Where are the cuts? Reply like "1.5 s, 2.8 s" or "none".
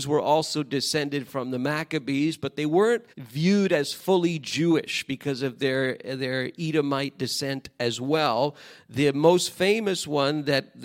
3.1 s